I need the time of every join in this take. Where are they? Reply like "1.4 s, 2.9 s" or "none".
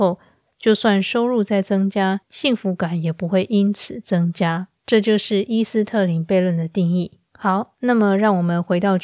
2.2 s, 4.8 s, 7.3 s